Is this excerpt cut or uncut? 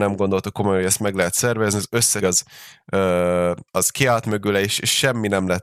cut